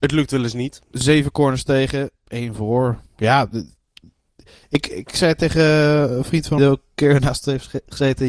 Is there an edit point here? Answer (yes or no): yes